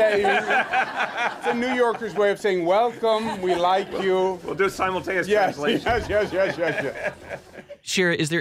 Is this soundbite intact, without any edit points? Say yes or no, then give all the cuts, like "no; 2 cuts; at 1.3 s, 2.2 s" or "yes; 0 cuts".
yes; 0 cuts